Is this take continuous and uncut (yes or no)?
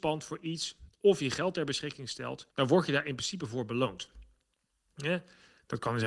no